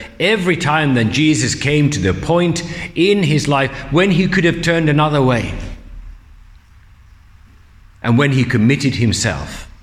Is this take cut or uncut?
uncut